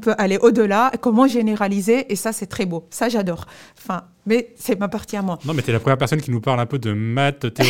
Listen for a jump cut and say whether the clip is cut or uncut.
uncut